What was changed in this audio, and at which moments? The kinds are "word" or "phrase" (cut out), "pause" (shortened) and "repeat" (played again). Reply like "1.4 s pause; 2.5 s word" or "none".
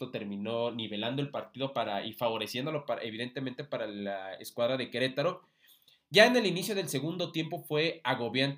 none

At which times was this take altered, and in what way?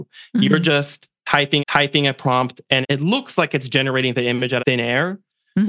1.6 s repeat; 2.8 s word; 4.6 s word

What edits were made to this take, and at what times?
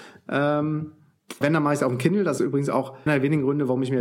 1.4 s word; 2.4 s word; 3.1 s word

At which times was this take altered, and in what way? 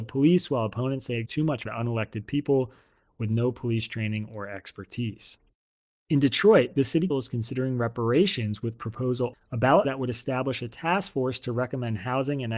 1.3 s word; 1.6 s word; 7.1 s word; 9.3 s word; 9.8 s word

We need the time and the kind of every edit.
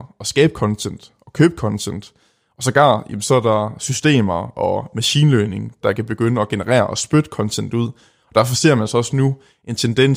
none

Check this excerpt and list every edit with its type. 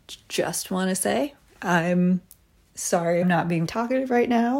3.2 s phrase; 3.7 s word

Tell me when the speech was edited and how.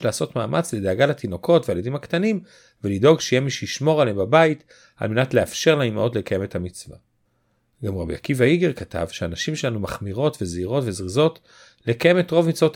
none

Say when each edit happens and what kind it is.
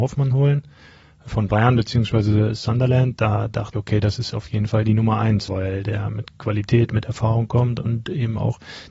3.7 s word; 5.5 s word

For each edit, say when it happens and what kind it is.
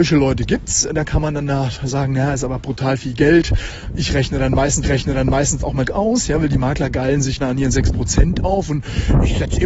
4.8 s repeat; 5.9 s phrase; 7.4 s word

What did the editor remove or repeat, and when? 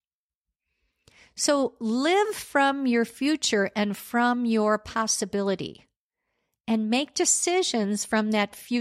none

